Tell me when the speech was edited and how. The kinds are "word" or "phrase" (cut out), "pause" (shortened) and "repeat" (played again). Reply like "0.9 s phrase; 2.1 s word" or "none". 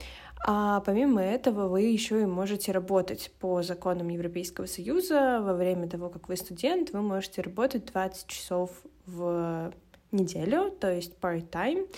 none